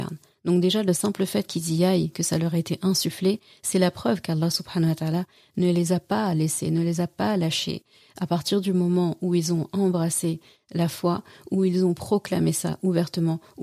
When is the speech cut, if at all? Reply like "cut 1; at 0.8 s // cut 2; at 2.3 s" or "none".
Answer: none